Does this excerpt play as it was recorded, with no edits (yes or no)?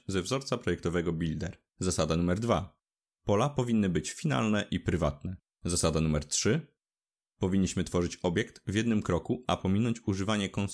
no